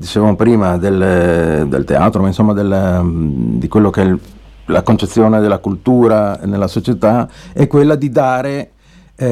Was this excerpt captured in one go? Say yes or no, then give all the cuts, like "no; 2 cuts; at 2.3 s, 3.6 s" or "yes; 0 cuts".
yes; 0 cuts